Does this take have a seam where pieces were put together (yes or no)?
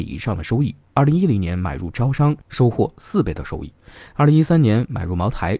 yes